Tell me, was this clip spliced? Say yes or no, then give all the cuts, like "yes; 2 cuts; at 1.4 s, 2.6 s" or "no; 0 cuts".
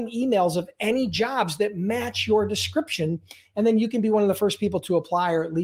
no; 0 cuts